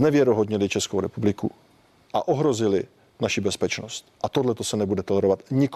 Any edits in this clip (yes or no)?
yes